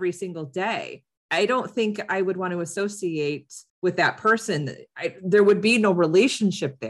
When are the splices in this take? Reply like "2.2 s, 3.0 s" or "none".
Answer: 3.7 s